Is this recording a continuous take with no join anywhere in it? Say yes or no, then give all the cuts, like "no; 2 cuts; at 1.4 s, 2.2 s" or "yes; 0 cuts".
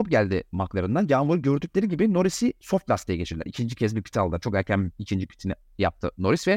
yes; 0 cuts